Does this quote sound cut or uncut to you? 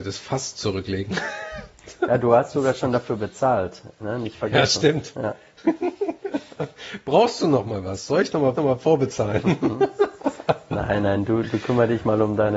cut